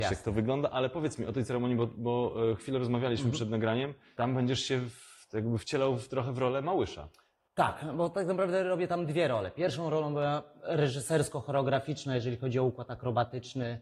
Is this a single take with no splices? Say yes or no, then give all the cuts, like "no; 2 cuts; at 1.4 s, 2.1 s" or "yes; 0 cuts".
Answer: yes; 0 cuts